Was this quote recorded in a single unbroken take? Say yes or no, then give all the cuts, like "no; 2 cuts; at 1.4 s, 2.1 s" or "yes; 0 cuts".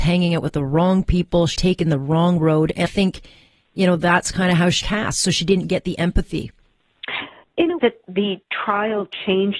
no; 4 cuts; at 1.6 s, 2.9 s, 4.8 s, 7.8 s